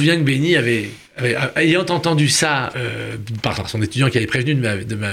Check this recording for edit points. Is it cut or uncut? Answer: cut